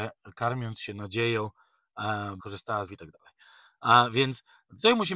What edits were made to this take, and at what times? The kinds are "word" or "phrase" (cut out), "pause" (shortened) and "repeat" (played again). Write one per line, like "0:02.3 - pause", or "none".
0:02.4 - phrase
0:02.9 - phrase

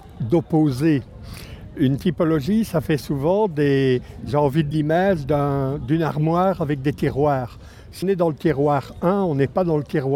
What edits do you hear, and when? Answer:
0:04.7 - word
0:08.0 - word

